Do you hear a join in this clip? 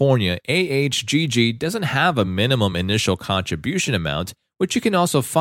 no; 0 cuts

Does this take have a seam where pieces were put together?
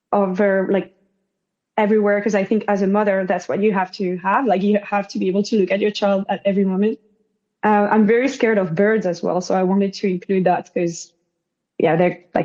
no; 0 cuts

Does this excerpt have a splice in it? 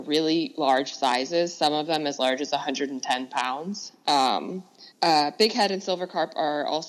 yes; 1 cut; at 4.9 s

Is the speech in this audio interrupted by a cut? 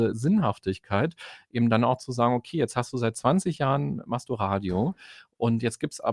no; 0 cuts

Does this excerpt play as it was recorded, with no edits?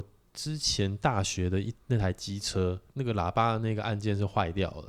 no; 1 cut; at 2.9 s

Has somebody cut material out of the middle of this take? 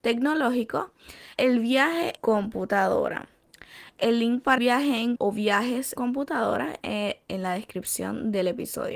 yes; 6 cuts; at 1.4 s, 2.2 s, 4.6 s, 5.2 s, 6.0 s, 6.8 s

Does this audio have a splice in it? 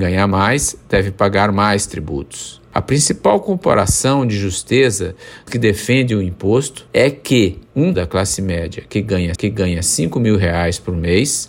yes; 3 cuts; at 5.5 s, 7.9 s, 9.4 s

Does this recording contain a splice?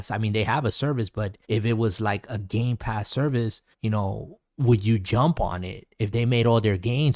yes; 3 cuts; at 1.4 s, 3.7 s, 4.5 s

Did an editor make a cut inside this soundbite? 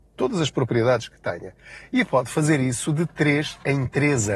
no; 0 cuts

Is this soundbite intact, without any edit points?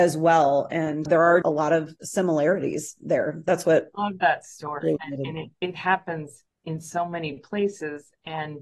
no; 5 cuts; at 1.1 s, 1.4 s, 5.0 s, 5.5 s, 6.5 s

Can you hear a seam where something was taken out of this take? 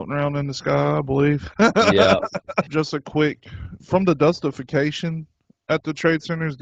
yes; 1 cut; at 3.8 s

